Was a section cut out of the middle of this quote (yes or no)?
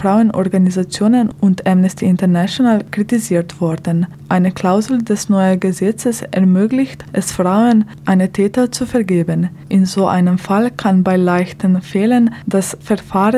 no